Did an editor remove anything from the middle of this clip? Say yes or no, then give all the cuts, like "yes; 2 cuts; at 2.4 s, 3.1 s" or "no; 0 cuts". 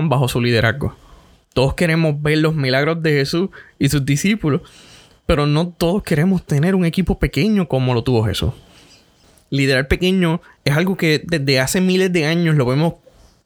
no; 0 cuts